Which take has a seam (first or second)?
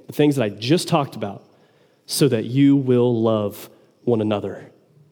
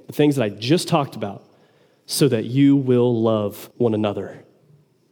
second